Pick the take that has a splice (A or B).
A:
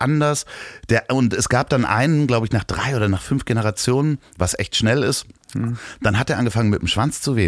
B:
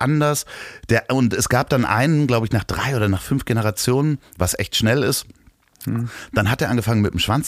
A